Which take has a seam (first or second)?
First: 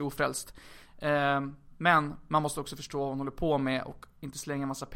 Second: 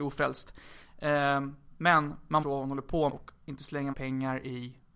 second